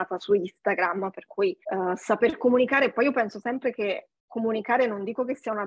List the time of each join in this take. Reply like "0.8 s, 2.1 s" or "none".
1.6 s